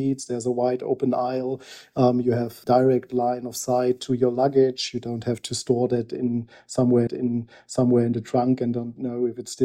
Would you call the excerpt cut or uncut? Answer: cut